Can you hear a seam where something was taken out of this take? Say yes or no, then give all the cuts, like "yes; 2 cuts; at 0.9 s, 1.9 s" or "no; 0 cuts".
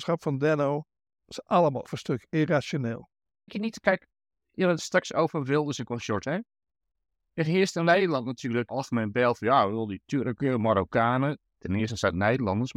yes; 3 cuts; at 1.8 s, 4.5 s, 8.7 s